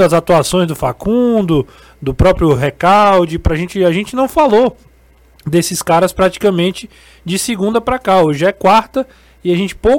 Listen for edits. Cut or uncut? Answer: uncut